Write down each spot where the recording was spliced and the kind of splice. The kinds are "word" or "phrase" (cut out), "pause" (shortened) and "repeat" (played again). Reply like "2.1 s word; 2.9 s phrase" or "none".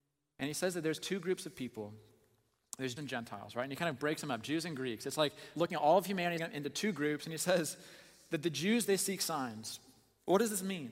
3.0 s word; 5.5 s word; 6.4 s word